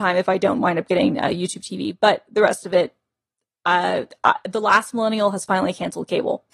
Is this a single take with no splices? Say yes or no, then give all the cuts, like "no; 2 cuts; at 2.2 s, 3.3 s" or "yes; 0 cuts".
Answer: yes; 0 cuts